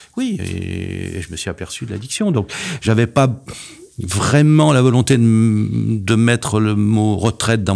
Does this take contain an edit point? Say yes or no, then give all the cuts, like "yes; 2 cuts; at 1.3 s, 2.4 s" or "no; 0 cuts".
no; 0 cuts